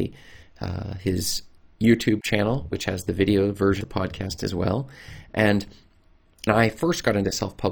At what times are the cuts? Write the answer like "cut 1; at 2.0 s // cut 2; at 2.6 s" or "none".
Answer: cut 1; at 2.7 s // cut 2; at 3.8 s // cut 3; at 6.5 s